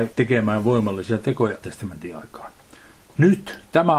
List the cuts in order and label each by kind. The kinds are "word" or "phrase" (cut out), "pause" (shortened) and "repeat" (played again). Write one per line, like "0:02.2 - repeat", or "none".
0:01.6 - word